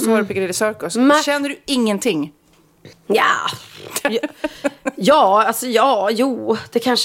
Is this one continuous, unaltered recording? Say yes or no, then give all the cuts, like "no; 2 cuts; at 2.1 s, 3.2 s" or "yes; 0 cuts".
no; 1 cut; at 2.9 s